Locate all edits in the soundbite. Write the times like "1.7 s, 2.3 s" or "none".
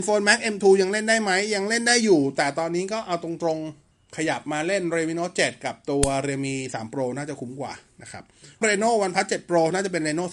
3.9 s, 8.6 s